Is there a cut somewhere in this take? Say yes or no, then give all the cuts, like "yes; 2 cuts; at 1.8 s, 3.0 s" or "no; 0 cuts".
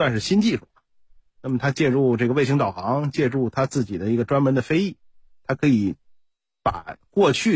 no; 0 cuts